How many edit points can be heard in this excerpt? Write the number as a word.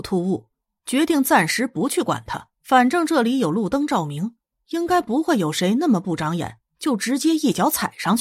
one